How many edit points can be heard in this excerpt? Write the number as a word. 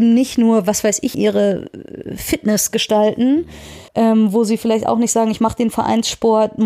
two